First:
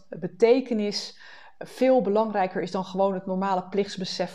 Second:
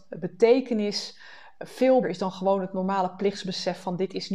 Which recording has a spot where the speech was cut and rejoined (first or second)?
second